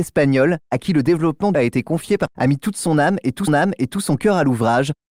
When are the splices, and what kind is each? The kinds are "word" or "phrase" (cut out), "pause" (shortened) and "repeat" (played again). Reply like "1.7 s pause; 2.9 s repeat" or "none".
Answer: 1.5 s phrase; 2.3 s word; 3.5 s repeat